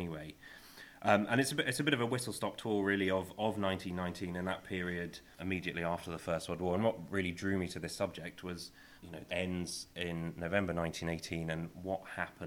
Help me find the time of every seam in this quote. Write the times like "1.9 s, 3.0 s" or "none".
5.4 s, 9.0 s, 9.3 s